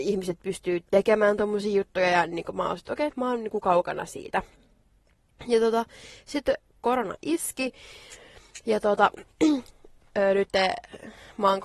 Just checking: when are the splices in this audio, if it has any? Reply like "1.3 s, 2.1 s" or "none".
none